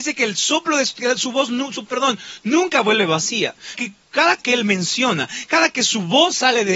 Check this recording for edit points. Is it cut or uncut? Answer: cut